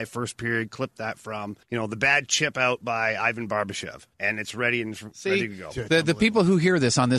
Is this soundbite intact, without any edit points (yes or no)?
no